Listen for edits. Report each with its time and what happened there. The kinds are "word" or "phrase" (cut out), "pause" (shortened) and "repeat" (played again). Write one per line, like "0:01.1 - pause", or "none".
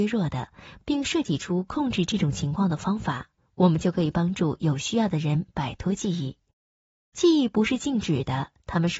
none